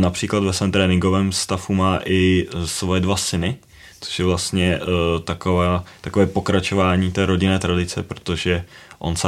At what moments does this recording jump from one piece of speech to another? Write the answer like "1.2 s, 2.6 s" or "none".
none